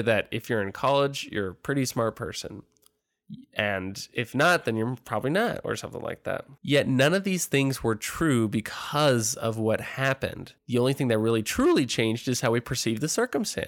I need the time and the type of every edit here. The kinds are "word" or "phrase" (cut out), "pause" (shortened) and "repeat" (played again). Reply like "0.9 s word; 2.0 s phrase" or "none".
6.6 s pause; 10.6 s pause